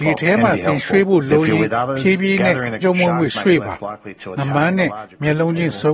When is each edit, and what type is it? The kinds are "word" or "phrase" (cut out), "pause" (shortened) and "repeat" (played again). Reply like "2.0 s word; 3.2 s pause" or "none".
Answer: 2.8 s phrase